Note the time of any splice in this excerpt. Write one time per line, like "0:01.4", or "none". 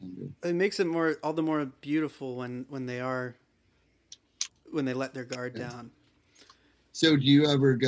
none